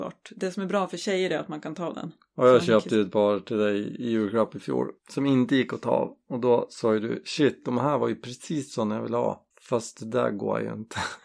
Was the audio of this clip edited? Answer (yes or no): yes